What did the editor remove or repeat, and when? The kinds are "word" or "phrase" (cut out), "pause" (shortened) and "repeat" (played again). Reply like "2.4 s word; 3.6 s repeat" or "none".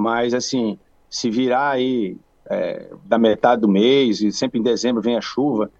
none

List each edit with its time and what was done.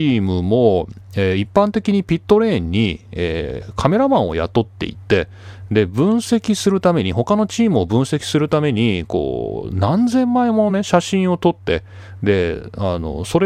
none

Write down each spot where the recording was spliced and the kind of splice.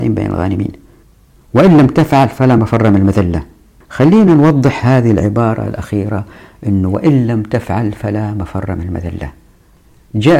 none

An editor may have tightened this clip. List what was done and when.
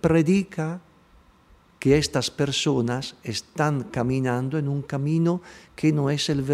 none

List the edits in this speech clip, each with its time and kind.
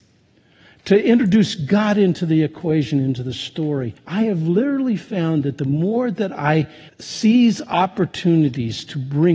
4.0 s pause; 6.9 s pause

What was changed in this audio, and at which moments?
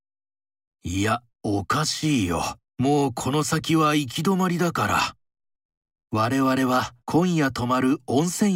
1.3 s pause; 2.6 s pause; 5.5 s pause; 7.0 s pause

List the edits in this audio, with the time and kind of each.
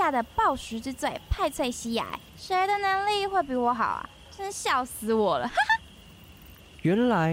2.3 s pause

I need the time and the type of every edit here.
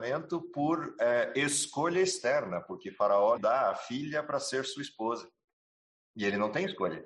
3.4 s word

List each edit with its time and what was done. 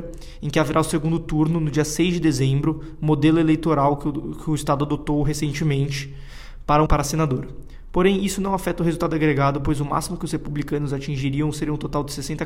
6.9 s word

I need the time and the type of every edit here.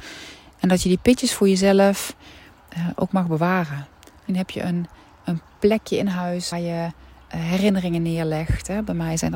4.3 s word; 6.5 s word

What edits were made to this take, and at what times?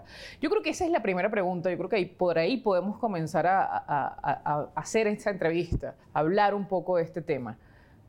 6.0 s pause

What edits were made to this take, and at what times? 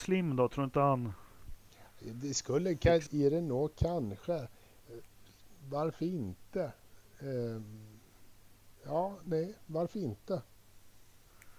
3.1 s word; 8.8 s pause

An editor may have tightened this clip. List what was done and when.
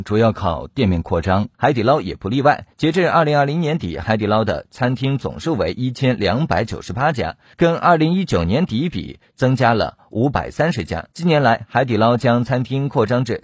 1.5 s pause; 2.7 s pause; 11.1 s pause

